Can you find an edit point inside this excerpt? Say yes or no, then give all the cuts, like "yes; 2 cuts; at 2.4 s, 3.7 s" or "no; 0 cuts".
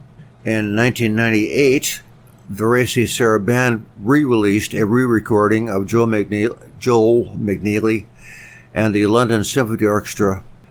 no; 0 cuts